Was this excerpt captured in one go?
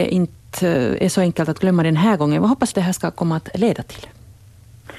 no; 1 cut; at 2.7 s

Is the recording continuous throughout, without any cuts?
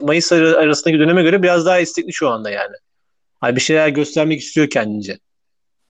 yes; 0 cuts

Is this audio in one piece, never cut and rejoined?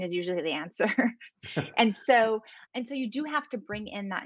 no; 1 cut; at 2.7 s

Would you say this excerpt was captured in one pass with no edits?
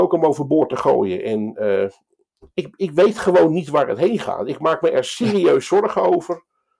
yes; 0 cuts

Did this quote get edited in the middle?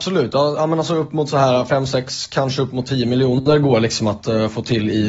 no; 0 cuts

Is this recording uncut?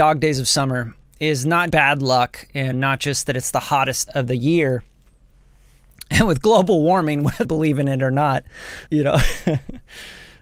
no; 5 cuts; at 1.7 s, 2.7 s, 4.1 s, 7.4 s, 8.9 s

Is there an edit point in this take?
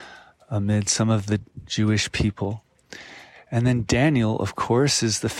no; 0 cuts

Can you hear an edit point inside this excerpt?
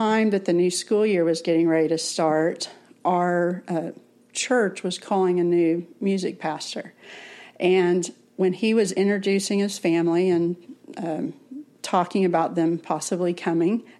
no; 0 cuts

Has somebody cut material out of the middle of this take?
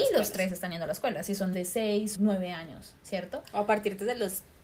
yes; 2 cuts; at 1.5 s, 2.1 s

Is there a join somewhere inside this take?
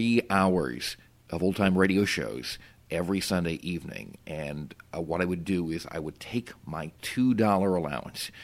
no; 0 cuts

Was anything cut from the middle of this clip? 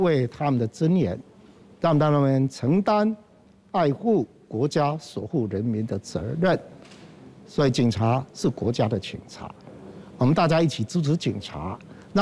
no; 0 cuts

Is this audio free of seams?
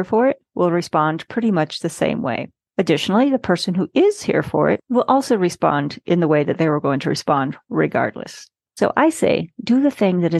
yes; 0 cuts

